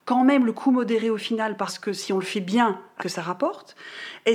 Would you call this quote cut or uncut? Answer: cut